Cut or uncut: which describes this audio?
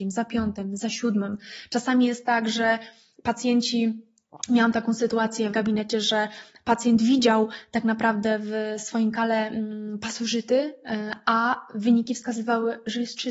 cut